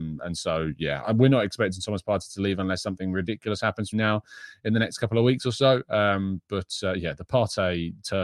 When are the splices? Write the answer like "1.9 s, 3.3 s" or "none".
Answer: 1.0 s, 3.9 s